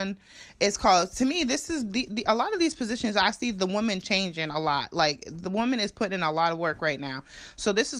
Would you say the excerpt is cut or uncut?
uncut